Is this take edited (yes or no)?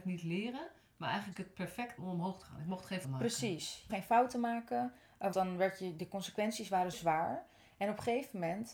yes